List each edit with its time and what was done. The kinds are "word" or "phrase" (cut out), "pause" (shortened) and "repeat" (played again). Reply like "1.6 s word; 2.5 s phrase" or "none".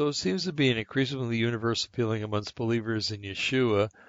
none